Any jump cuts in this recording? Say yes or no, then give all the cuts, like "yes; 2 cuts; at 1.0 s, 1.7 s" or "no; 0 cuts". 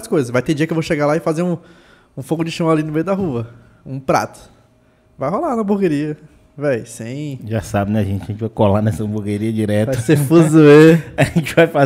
no; 0 cuts